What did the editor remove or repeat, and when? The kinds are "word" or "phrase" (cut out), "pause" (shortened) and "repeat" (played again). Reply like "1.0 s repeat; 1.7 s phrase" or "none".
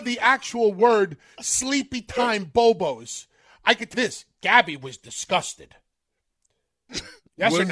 3.9 s word